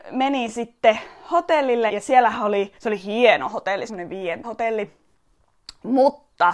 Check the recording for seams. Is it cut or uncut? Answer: cut